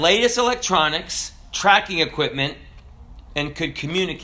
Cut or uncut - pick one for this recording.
uncut